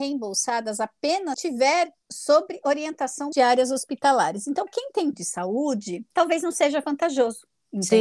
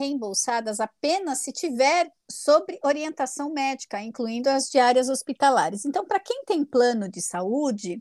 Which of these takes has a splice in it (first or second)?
first